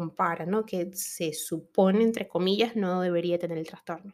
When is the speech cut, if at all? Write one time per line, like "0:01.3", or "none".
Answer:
none